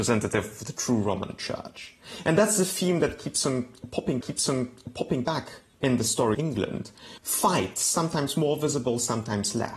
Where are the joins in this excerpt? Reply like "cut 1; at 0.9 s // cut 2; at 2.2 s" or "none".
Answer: cut 1; at 4.2 s // cut 2; at 6.3 s // cut 3; at 7.2 s